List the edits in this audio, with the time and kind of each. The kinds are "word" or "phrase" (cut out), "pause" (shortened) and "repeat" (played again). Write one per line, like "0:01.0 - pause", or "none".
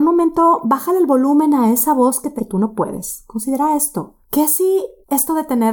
0:02.4 - word
0:04.2 - pause